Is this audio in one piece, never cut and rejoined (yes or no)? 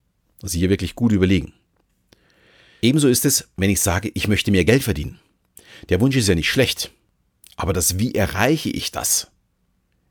yes